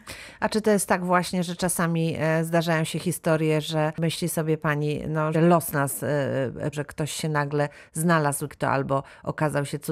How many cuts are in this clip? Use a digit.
3